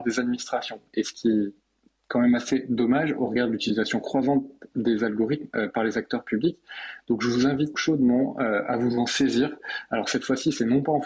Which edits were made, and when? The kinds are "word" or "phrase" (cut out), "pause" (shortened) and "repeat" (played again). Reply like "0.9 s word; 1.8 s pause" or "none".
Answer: 7.7 s word